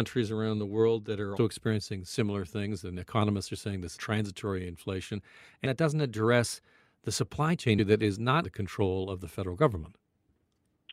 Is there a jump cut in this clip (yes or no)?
yes